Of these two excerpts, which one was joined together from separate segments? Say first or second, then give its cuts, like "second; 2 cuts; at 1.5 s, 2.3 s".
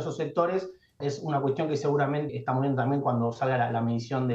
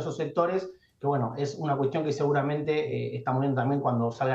first; 2 cuts; at 1.0 s, 2.3 s